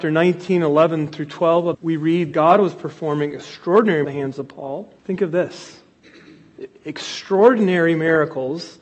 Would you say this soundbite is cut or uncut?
cut